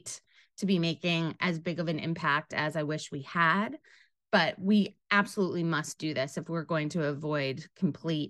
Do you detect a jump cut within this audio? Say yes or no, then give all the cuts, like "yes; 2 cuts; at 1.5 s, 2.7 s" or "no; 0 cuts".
no; 0 cuts